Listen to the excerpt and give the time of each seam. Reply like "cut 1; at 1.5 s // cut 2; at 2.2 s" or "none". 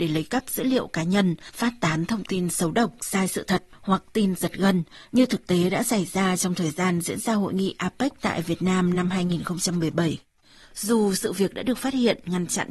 none